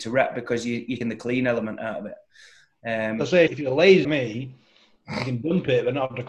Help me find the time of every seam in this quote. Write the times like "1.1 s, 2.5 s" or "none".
1.0 s, 3.5 s, 4.0 s